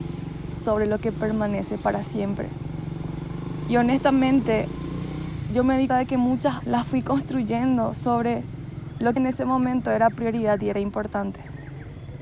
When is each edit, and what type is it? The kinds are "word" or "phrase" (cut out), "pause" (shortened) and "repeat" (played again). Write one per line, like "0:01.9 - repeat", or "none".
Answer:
0:05.9 - word
0:06.6 - phrase
0:09.2 - phrase